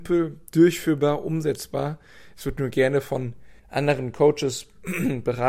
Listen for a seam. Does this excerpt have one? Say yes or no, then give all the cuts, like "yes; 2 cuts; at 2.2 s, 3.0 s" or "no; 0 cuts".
yes; 1 cut; at 3.6 s